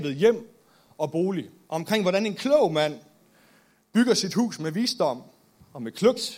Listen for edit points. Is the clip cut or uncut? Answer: uncut